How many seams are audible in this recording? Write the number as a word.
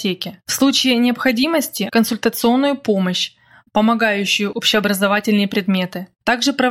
two